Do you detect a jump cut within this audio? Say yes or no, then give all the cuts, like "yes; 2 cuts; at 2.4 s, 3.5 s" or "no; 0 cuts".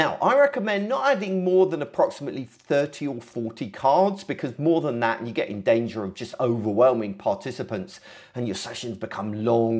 no; 0 cuts